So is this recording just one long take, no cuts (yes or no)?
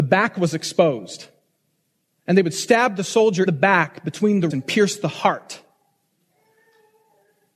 no